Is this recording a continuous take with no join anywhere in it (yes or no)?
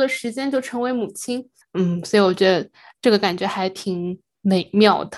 yes